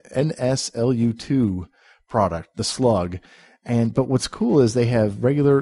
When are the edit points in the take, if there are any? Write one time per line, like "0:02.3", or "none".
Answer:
none